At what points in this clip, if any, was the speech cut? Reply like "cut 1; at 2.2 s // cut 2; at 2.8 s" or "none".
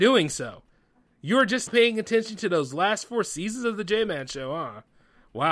cut 1; at 1.7 s